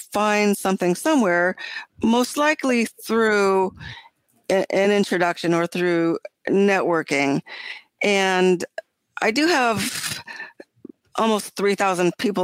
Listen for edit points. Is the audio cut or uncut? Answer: uncut